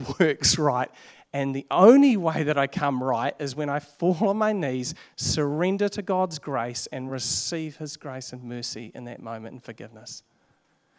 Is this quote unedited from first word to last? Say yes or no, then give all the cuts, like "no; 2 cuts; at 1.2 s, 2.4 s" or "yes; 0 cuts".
yes; 0 cuts